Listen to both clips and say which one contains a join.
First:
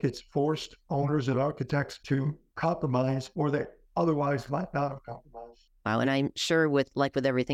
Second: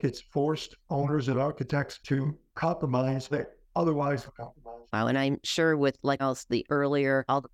second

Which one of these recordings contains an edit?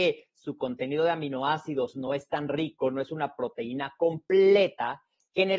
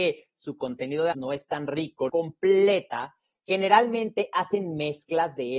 second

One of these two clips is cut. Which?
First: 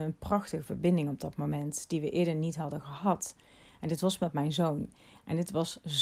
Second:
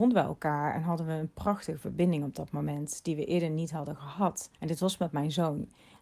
second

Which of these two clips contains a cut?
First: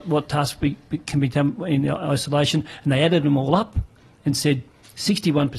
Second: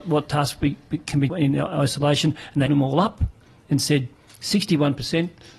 second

